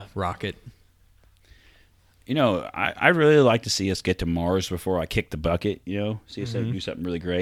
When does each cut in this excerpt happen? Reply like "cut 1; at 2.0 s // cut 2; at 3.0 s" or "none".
none